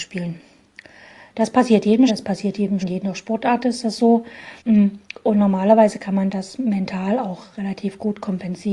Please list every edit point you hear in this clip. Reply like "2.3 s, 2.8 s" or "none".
2.1 s, 2.8 s, 4.6 s